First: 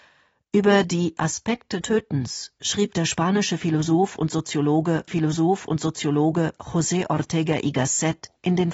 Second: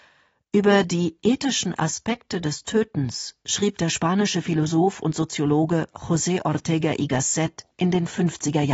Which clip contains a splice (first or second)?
first